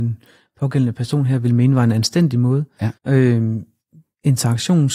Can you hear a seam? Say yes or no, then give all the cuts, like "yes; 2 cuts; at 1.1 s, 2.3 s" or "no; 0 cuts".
yes; 1 cut; at 3.0 s